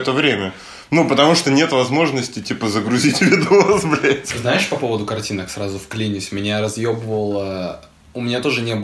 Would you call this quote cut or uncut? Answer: cut